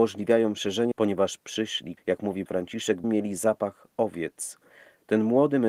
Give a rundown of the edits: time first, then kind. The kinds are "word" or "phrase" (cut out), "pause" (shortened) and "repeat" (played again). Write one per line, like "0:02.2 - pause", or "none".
0:00.9 - word
0:02.0 - word
0:02.5 - word
0:03.0 - word